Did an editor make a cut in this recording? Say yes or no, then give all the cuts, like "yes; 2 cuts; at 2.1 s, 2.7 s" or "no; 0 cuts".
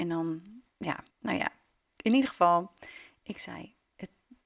yes; 1 cut; at 1.1 s